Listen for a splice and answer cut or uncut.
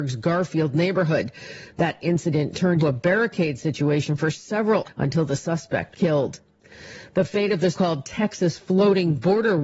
cut